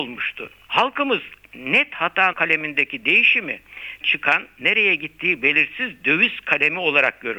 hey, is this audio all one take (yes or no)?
no